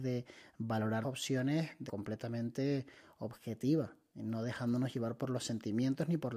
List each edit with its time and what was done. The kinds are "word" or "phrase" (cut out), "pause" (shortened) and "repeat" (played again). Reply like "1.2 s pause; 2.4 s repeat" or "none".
1.0 s word; 1.9 s word

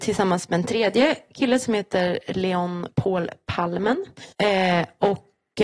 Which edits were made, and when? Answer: 4.3 s pause

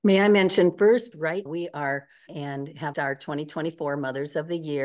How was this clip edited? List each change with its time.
1.1 s word; 1.5 s word; 2.3 s word; 2.9 s word

